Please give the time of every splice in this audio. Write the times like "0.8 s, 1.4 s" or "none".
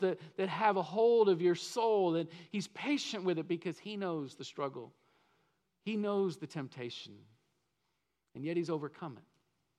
none